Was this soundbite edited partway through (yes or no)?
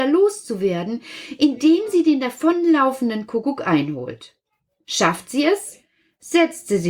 no